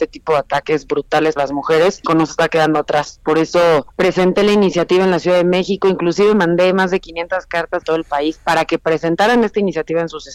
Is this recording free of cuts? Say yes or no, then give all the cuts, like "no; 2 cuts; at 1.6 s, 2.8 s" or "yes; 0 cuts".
no; 4 cuts; at 1.4 s, 2.1 s, 3.9 s, 7.8 s